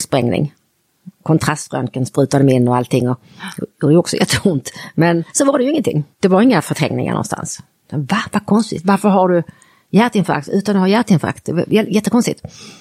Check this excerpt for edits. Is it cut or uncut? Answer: cut